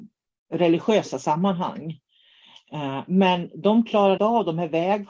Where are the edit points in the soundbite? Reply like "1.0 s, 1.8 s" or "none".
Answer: 4.2 s